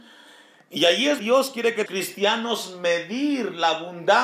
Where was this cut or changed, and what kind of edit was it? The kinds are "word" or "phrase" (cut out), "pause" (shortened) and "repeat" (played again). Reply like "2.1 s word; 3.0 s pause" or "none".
1.2 s word; 1.9 s phrase